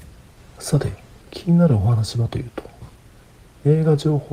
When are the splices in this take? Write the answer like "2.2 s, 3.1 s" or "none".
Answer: none